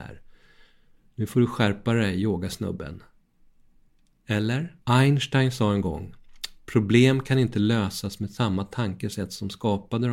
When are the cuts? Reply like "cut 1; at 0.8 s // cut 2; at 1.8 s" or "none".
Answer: cut 1; at 4.8 s